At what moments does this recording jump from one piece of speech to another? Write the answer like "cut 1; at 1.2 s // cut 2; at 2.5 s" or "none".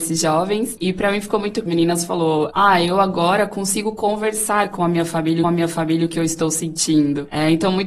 cut 1; at 1.7 s // cut 2; at 5.4 s